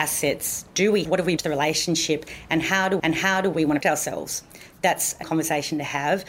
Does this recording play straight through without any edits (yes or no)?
no